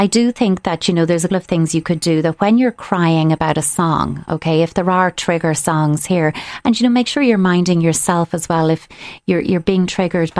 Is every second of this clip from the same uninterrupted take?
no; 1 cut; at 1.3 s

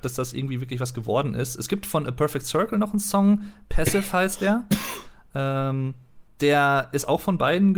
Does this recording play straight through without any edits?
yes; 0 cuts

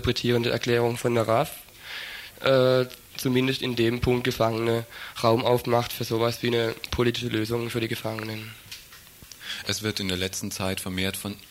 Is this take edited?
no; 0 cuts

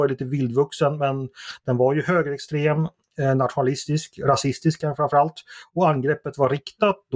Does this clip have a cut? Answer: no; 0 cuts

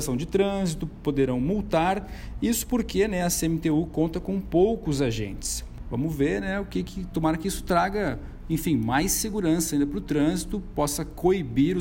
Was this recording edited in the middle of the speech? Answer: no; 0 cuts

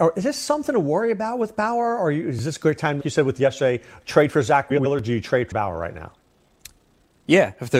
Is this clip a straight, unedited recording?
no; 2 cuts; at 3.0 s, 5.5 s

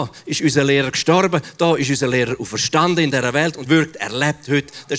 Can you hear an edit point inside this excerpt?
yes; 1 cut; at 3.7 s

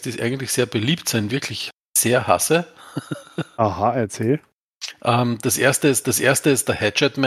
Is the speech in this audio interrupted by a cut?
yes; 2 cuts; at 1.3 s, 6.0 s

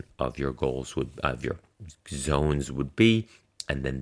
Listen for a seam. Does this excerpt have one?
no; 0 cuts

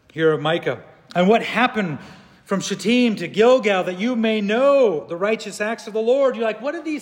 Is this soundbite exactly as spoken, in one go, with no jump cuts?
yes; 0 cuts

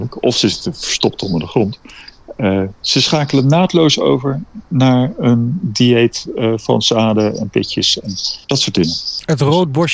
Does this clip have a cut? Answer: yes; 1 cut; at 8.4 s

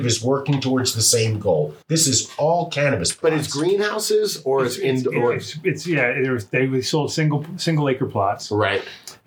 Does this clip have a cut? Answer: yes; 1 cut; at 1.8 s

